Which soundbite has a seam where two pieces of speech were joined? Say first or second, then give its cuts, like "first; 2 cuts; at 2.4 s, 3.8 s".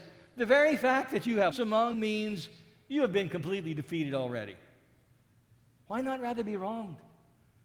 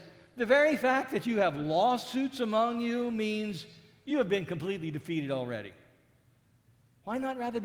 first; 2 cuts; at 1.5 s, 1.9 s